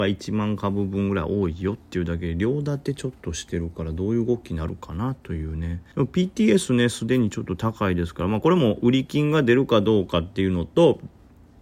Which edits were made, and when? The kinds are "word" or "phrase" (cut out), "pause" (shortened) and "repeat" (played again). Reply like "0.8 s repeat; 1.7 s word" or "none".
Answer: 5.9 s pause